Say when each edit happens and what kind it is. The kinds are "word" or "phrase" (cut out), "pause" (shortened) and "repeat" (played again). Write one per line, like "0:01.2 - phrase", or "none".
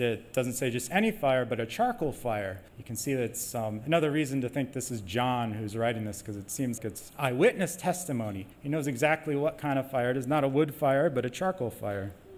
0:02.7 - pause
0:06.8 - word
0:07.1 - word
0:08.5 - pause